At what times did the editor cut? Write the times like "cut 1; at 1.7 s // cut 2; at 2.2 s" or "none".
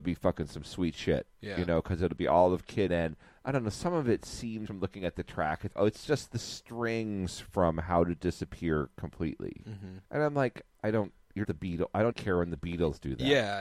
cut 1; at 2.9 s // cut 2; at 4.7 s // cut 3; at 5.7 s // cut 4; at 10.1 s // cut 5; at 11.4 s // cut 6; at 12.1 s